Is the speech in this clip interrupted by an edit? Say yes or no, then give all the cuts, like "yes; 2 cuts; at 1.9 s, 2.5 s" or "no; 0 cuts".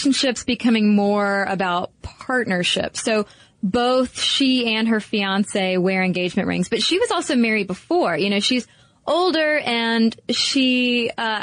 no; 0 cuts